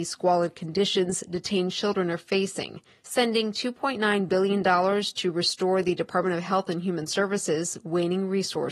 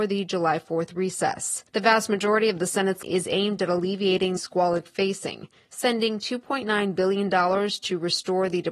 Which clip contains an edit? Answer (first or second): second